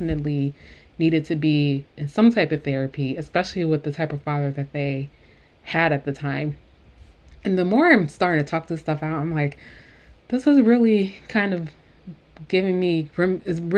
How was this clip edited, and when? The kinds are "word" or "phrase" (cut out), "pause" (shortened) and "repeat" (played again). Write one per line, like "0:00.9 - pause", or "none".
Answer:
none